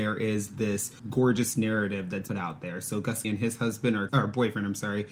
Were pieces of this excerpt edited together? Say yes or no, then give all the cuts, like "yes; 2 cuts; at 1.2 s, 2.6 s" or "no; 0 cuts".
yes; 4 cuts; at 1.0 s, 2.3 s, 3.2 s, 4.1 s